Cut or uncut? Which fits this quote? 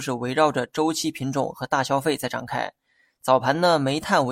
uncut